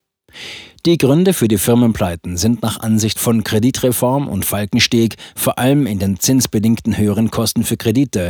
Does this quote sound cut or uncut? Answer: uncut